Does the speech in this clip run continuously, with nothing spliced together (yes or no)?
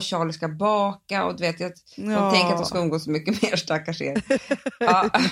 yes